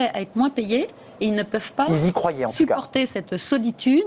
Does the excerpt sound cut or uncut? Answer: uncut